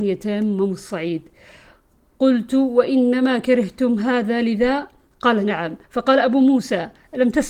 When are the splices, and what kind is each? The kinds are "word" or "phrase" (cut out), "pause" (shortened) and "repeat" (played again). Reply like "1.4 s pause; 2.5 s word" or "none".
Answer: 5.8 s pause